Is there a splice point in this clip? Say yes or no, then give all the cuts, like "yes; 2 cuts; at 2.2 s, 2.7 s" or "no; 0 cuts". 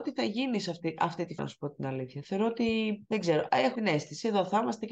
yes; 3 cuts; at 1.4 s, 3.1 s, 3.7 s